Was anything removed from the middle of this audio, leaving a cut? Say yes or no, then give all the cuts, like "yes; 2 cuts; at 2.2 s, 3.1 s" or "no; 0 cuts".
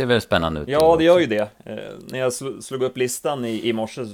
no; 0 cuts